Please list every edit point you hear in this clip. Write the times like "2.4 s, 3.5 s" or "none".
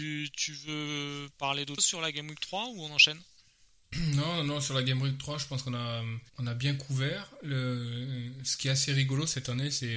1.3 s, 1.8 s, 6.3 s